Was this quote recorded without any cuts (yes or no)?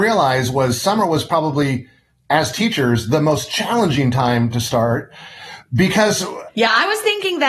yes